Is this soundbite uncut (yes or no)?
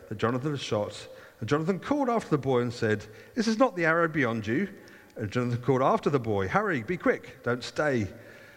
yes